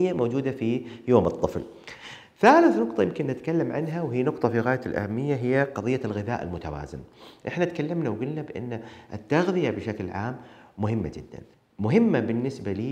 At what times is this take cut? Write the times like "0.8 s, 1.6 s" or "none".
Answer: 11.5 s